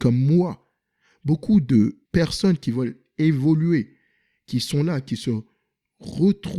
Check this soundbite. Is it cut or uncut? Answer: cut